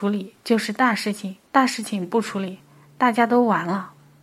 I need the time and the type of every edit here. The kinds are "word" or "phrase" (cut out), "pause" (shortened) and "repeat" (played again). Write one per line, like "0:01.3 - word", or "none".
0:01.5 - pause